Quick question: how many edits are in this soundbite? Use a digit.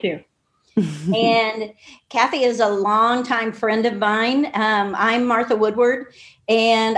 0